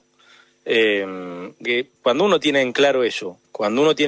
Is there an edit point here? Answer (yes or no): yes